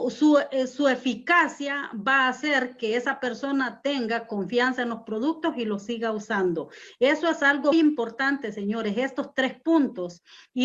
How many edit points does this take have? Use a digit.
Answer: 1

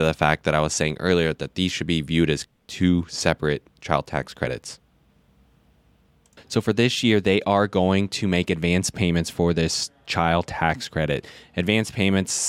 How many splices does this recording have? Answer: 0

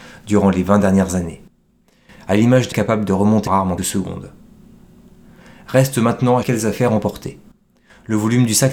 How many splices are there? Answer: 4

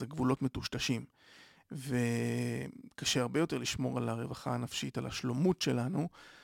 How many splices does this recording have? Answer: 0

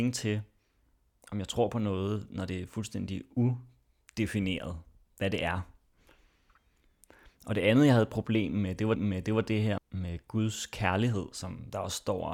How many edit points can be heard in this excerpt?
2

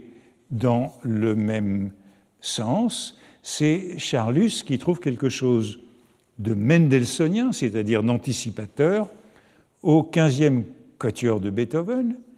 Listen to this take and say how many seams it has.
0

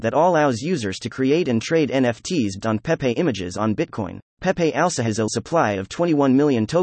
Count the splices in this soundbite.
3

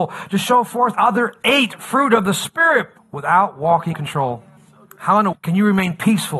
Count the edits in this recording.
5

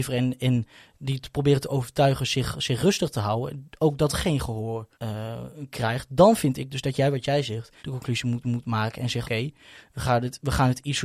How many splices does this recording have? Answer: 5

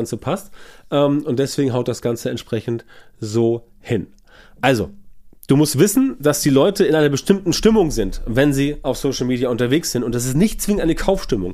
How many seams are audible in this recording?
0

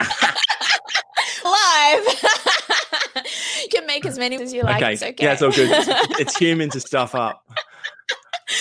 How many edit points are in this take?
4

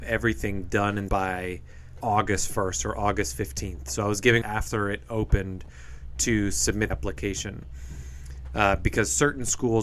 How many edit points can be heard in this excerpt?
4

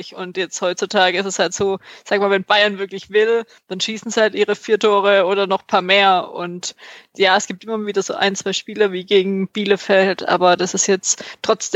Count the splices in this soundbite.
0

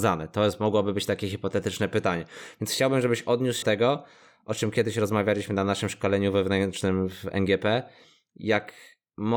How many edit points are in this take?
1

